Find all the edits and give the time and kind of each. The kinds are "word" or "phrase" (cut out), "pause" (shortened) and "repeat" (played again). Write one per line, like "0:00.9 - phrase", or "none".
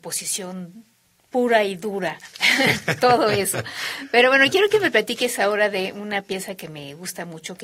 none